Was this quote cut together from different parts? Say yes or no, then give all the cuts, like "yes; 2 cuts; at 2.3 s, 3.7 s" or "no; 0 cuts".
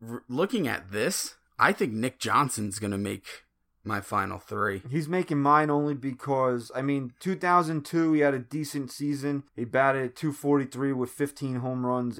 yes; 1 cut; at 9.5 s